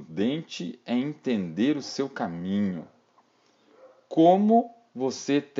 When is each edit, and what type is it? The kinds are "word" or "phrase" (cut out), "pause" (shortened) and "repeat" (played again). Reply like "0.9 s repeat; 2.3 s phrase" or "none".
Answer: none